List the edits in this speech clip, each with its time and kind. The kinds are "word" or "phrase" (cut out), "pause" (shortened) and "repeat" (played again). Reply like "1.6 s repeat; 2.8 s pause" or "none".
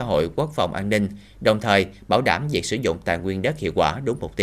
none